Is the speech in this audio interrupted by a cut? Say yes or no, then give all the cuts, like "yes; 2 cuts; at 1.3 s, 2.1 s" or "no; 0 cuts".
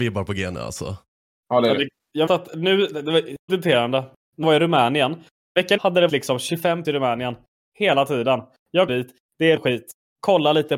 yes; 8 cuts; at 2.3 s, 3.5 s, 4.4 s, 5.8 s, 6.1 s, 6.8 s, 8.9 s, 9.6 s